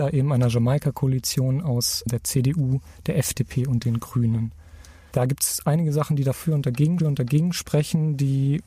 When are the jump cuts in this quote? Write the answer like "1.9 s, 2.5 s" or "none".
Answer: 7.0 s